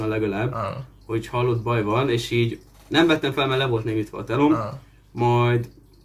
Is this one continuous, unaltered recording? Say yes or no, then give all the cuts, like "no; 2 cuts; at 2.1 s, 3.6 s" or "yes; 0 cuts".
yes; 0 cuts